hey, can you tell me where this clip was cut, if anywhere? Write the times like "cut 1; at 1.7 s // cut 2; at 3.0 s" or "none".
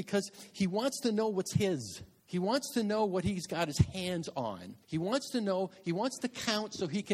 cut 1; at 2.2 s // cut 2; at 4.8 s

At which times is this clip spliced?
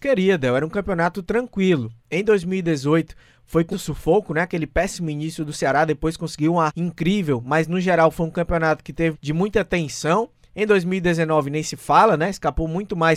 cut 1; at 3.7 s // cut 2; at 6.7 s // cut 3; at 9.1 s

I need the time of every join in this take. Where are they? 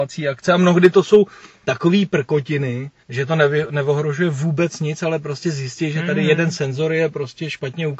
cut 1; at 3.0 s

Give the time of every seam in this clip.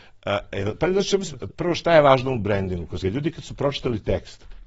cut 1; at 1.5 s // cut 2; at 3.0 s

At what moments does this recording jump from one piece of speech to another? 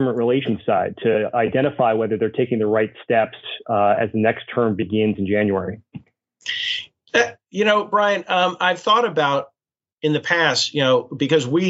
none

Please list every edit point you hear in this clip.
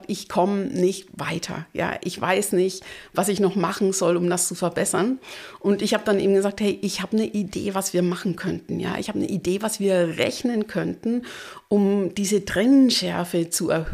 none

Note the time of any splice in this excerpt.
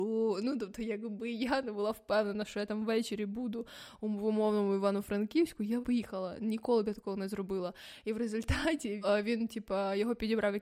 cut 1; at 5.8 s // cut 2; at 9.0 s

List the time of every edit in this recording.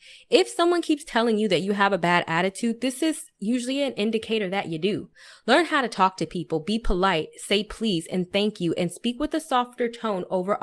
none

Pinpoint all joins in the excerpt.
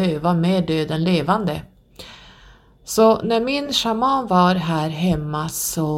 none

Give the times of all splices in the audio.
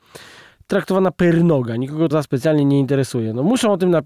cut 1; at 2.1 s

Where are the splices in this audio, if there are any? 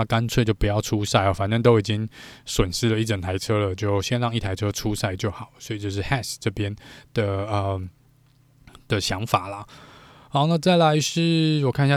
none

